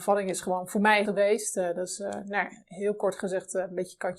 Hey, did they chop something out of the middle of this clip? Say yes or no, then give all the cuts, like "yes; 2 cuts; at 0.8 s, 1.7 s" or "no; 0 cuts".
yes; 1 cut; at 1.0 s